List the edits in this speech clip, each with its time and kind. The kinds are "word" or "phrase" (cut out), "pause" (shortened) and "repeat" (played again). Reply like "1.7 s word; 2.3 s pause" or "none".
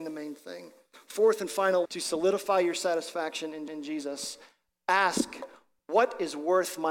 1.9 s word; 3.7 s repeat